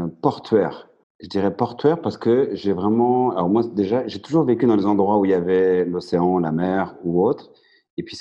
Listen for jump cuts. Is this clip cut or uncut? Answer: cut